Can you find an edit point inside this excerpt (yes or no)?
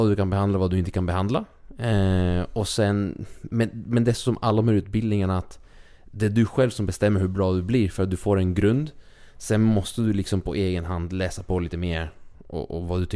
no